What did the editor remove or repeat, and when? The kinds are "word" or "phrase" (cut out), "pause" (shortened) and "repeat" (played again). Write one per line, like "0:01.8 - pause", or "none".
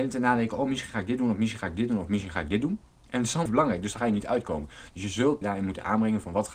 0:02.9 - pause
0:03.5 - word
0:05.4 - word